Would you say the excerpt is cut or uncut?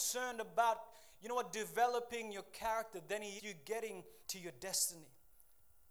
cut